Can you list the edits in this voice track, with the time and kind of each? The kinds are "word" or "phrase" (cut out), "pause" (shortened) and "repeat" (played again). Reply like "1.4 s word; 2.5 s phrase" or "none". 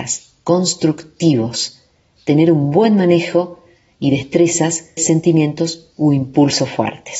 5.0 s word